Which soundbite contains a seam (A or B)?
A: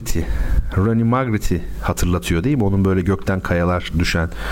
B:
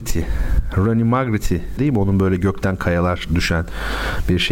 B